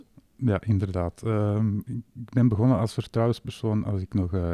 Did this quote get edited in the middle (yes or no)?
yes